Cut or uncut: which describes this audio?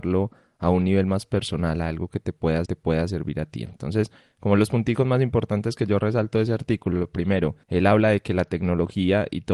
cut